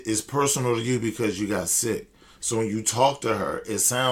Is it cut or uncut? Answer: uncut